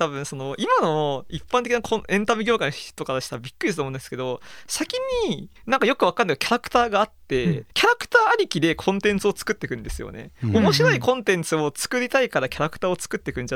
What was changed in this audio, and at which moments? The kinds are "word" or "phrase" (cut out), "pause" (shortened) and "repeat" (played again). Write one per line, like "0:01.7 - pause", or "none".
0:05.6 - pause
0:07.7 - pause